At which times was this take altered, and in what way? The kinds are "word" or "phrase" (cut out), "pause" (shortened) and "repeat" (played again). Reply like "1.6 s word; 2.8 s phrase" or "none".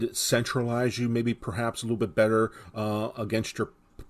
none